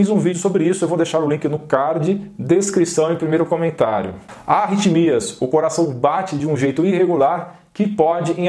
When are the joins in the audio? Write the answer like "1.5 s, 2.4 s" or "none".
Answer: none